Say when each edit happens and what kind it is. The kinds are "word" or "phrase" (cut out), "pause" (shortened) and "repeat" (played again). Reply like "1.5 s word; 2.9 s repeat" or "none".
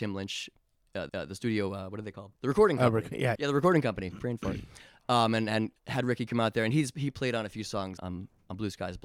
1.1 s repeat; 2.4 s pause; 3.4 s word; 5.8 s pause; 8.0 s word